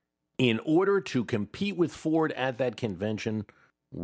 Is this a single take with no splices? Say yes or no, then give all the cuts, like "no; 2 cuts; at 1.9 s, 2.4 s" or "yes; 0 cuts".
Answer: yes; 0 cuts